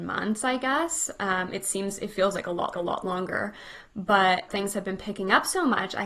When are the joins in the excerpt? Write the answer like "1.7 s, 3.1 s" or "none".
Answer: 2.7 s, 4.5 s